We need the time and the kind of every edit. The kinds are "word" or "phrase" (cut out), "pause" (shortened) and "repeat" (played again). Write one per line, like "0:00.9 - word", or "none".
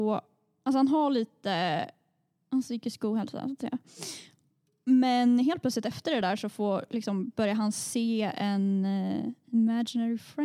none